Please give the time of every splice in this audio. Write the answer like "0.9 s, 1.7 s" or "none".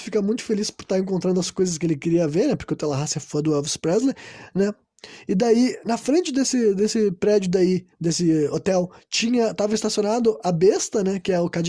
7.9 s